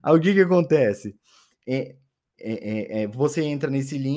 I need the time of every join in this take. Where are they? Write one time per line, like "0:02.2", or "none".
none